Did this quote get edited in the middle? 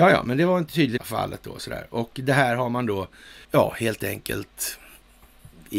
yes; 2 cuts; at 1.0 s, 3.4 s

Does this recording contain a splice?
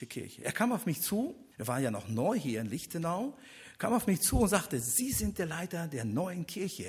yes; 1 cut; at 1.5 s

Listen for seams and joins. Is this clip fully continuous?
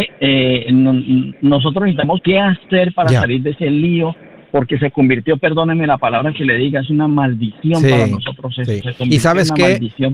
no; 1 cut; at 2.2 s

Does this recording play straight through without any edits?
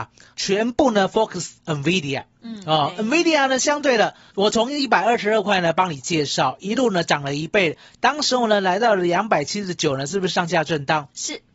no; 1 cut; at 1.6 s

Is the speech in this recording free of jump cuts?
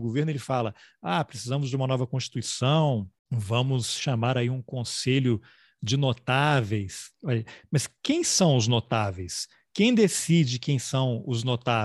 yes; 0 cuts

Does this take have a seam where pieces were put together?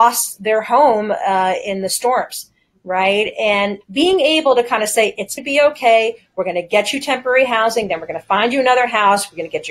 yes; 2 cuts; at 3.8 s, 5.4 s

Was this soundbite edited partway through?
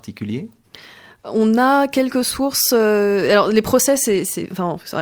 no; 0 cuts

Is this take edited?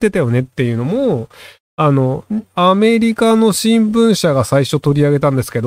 no; 0 cuts

